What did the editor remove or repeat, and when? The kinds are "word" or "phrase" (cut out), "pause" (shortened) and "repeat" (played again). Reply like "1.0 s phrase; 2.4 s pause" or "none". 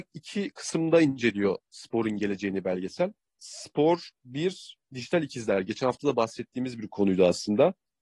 none

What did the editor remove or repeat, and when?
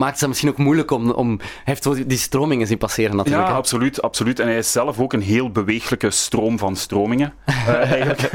none

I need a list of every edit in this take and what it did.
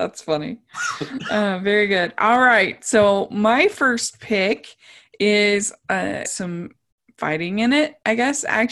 6.2 s word

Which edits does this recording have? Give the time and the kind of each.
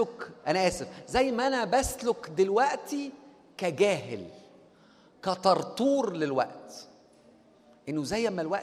none

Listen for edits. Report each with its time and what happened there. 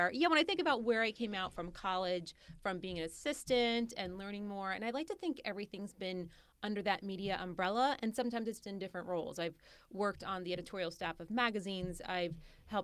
8.6 s word

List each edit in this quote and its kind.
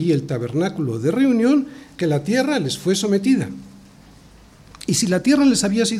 1.9 s word

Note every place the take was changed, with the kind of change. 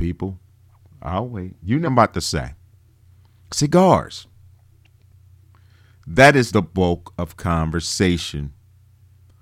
1.9 s word; 6.5 s word

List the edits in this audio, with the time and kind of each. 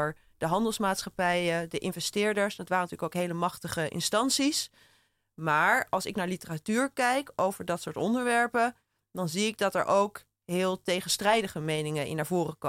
none

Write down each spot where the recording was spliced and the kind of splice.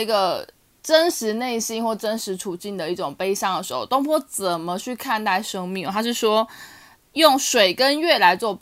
none

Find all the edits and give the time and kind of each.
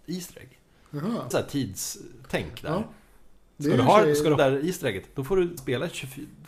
1.3 s word; 4.4 s word; 5.6 s word

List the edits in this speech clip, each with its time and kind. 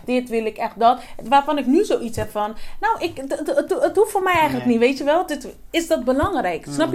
none

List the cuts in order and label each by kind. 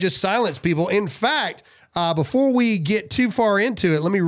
none

